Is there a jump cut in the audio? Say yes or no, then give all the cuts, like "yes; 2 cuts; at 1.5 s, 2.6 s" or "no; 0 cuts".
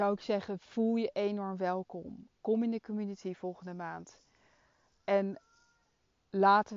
no; 0 cuts